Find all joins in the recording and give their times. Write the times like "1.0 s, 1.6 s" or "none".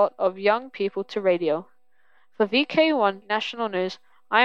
3.2 s